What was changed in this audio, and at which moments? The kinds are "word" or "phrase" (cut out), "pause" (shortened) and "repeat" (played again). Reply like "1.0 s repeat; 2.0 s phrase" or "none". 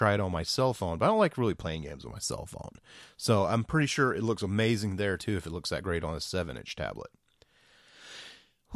none